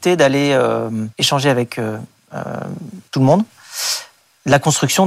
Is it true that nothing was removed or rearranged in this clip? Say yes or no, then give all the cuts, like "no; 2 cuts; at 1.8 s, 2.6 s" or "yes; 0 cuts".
no; 2 cuts; at 1.1 s, 3.1 s